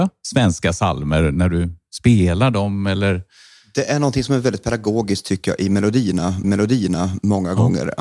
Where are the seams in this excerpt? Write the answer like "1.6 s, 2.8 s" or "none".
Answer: 6.4 s